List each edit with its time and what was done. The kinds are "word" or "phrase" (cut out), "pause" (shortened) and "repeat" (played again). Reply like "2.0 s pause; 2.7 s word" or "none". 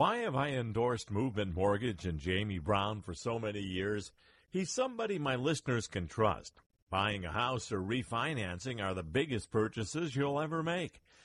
none